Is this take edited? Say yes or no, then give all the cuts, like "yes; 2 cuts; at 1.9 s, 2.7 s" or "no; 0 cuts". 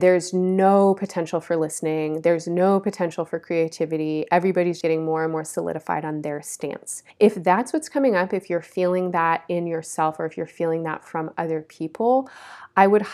yes; 2 cuts; at 4.8 s, 7.1 s